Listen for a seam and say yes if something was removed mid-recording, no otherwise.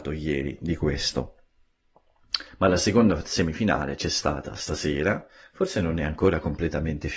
yes